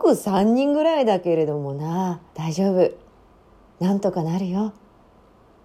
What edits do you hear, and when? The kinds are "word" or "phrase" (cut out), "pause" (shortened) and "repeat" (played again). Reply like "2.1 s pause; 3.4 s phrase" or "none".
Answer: 2.3 s pause